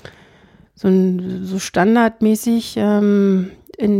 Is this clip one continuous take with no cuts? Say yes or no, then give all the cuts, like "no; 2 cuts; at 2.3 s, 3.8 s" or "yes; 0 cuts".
yes; 0 cuts